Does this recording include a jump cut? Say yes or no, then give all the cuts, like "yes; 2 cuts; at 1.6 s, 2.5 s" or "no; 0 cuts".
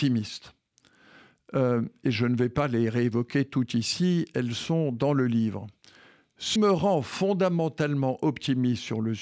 yes; 1 cut; at 6.6 s